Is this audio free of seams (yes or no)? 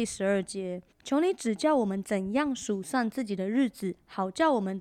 no